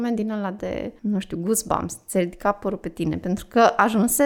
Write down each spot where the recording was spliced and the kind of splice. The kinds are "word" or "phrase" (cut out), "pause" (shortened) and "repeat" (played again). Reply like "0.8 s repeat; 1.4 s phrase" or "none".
1.0 s pause